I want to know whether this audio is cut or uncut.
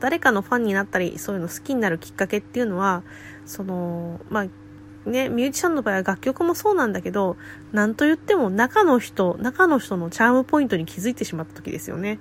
uncut